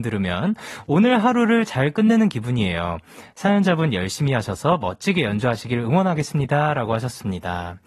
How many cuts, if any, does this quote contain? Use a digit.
0